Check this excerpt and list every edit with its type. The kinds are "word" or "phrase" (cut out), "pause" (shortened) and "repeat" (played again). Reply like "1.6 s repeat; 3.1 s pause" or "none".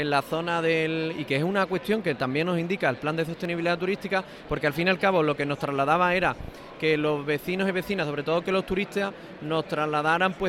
none

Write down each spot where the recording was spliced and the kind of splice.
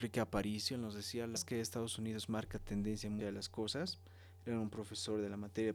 1.4 s word; 3.2 s word

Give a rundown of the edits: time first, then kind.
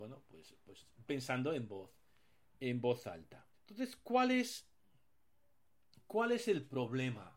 1.1 s word; 3.5 s pause

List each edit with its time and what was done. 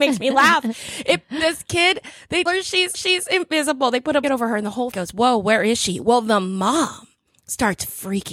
2.5 s word; 2.9 s repeat; 4.2 s word; 4.9 s word

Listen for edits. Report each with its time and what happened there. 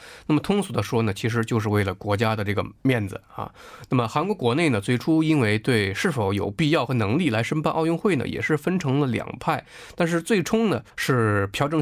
10.9 s pause

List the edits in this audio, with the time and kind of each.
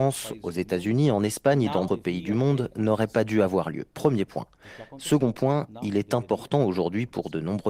1.9 s word

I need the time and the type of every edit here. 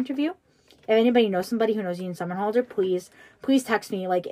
none

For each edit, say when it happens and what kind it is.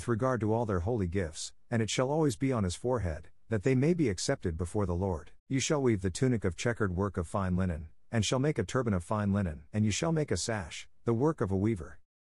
5.4 s pause; 9.7 s pause

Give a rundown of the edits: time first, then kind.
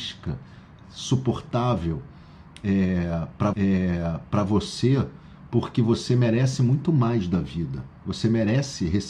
3.5 s repeat; 8.0 s pause

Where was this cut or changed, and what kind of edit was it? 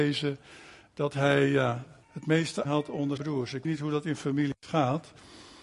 2.0 s word; 2.6 s word; 3.2 s word; 3.6 s word

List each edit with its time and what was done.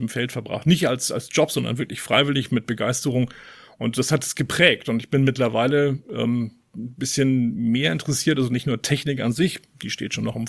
none

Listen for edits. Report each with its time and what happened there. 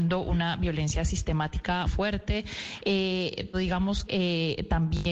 1.8 s word; 3.5 s word; 4.1 s word

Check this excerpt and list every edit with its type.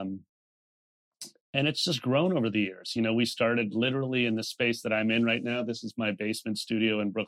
none

